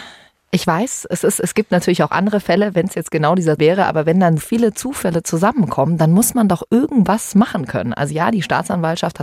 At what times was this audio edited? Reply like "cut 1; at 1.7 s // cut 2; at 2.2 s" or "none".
cut 1; at 3.6 s // cut 2; at 4.4 s